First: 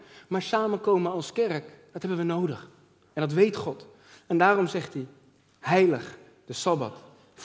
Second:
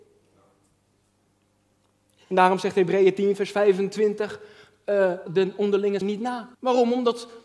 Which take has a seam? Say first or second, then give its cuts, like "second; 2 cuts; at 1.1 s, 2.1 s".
second; 3 cuts; at 5.3 s, 6.0 s, 6.5 s